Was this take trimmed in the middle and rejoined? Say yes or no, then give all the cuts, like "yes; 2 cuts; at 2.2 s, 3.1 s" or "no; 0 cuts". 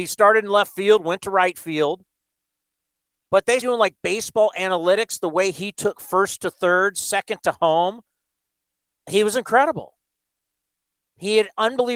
yes; 1 cut; at 3.6 s